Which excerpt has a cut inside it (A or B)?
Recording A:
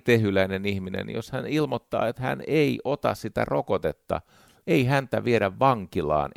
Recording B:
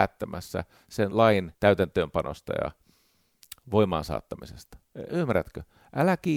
B